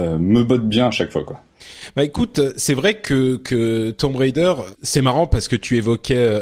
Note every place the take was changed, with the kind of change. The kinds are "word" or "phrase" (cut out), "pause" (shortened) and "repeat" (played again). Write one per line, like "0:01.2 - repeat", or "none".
0:04.7 - word